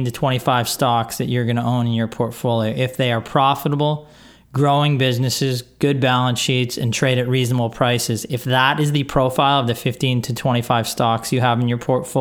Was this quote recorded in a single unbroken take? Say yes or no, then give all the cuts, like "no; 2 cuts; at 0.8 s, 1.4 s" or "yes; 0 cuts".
yes; 0 cuts